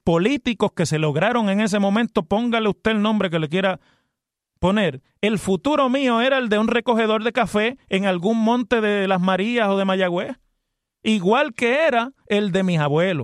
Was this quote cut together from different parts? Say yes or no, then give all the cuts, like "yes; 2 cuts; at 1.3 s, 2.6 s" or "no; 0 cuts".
no; 0 cuts